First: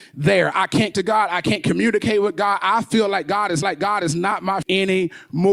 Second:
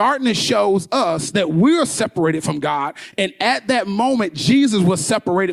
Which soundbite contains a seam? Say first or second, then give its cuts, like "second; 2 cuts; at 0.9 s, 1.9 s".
first; 3 cuts; at 0.9 s, 3.6 s, 4.6 s